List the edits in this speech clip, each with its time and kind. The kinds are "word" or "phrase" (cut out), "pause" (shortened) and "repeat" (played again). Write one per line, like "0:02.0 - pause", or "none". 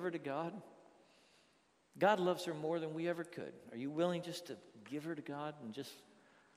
none